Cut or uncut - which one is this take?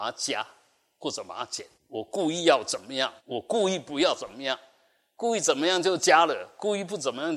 cut